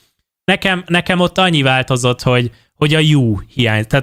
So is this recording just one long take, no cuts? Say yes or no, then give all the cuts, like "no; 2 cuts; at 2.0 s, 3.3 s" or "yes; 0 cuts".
yes; 0 cuts